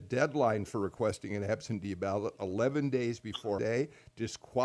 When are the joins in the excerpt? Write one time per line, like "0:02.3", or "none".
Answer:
0:03.6